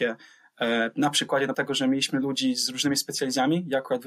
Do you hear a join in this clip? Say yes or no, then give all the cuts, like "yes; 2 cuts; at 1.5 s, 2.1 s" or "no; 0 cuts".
yes; 1 cut; at 1.5 s